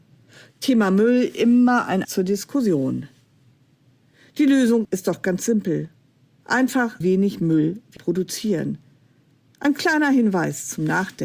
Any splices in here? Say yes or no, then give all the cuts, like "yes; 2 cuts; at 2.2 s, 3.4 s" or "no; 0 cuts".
yes; 4 cuts; at 2.0 s, 4.8 s, 7.0 s, 8.0 s